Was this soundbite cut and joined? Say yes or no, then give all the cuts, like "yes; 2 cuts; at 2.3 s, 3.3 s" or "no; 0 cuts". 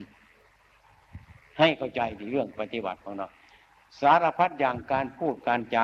no; 0 cuts